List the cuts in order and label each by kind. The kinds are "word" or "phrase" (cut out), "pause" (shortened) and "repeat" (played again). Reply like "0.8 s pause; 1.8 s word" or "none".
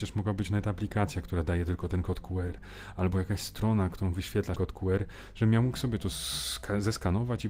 4.6 s phrase